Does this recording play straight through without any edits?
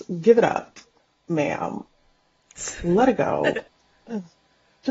no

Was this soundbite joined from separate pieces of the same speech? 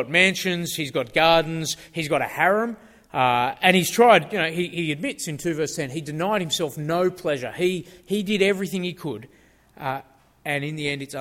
no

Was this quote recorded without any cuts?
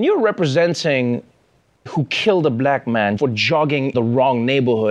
no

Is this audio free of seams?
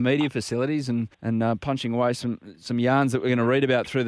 no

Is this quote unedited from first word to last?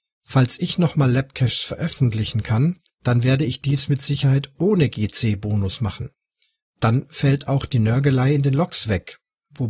no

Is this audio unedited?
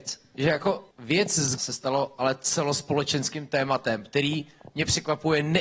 no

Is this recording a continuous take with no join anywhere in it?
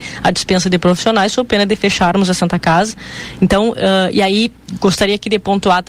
yes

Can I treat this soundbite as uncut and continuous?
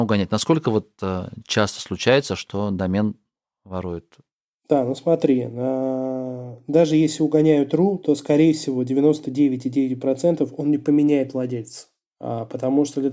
yes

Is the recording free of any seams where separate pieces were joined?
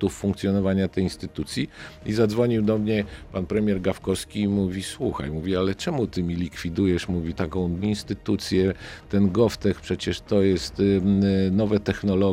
no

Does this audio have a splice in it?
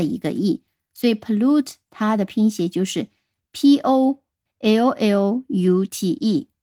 no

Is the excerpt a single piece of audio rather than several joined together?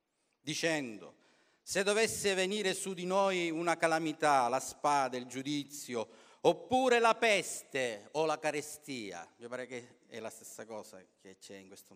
yes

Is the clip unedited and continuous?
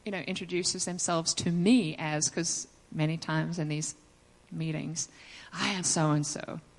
no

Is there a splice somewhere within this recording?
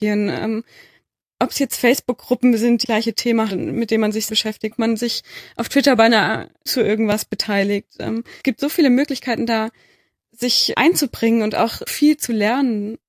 yes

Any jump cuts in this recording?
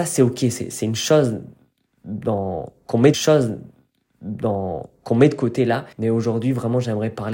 yes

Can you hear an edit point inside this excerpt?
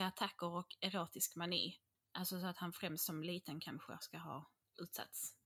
no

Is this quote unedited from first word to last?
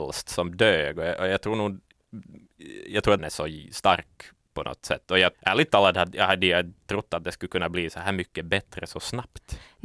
no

